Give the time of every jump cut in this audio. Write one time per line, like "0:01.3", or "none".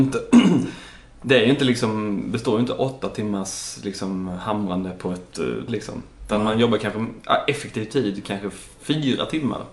0:05.7